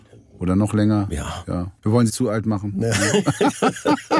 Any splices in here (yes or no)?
yes